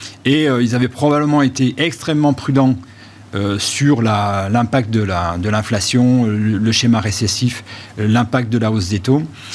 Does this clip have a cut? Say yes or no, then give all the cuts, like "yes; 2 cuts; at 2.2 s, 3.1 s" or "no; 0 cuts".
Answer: no; 0 cuts